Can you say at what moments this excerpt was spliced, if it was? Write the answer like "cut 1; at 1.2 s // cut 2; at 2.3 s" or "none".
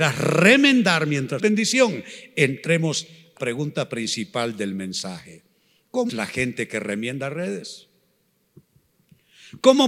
cut 1; at 1.4 s // cut 2; at 3.4 s // cut 3; at 6.1 s